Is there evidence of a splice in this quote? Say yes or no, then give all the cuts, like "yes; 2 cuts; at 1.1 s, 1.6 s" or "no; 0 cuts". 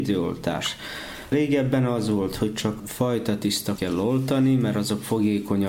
yes; 2 cuts; at 2.8 s, 3.8 s